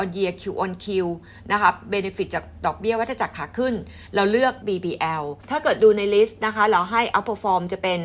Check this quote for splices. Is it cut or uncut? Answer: cut